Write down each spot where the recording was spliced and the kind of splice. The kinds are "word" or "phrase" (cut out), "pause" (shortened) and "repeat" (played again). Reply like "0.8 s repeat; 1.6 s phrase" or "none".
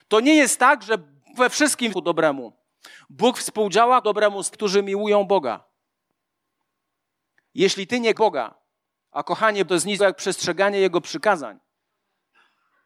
1.3 s word; 1.9 s word; 4.0 s word; 4.5 s word; 8.1 s word; 9.7 s word; 10.0 s word